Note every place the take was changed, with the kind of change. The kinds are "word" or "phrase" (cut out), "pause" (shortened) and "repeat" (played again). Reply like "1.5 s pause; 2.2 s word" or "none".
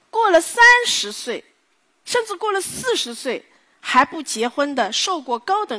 none